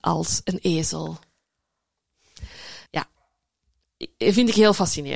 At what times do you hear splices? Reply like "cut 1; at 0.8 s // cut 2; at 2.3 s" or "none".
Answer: cut 1; at 2.9 s